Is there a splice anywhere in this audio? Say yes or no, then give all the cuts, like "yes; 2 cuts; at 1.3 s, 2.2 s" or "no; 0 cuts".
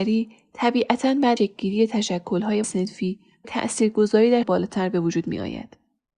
yes; 4 cuts; at 1.4 s, 2.6 s, 3.4 s, 4.4 s